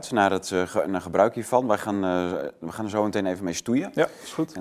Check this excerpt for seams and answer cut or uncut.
uncut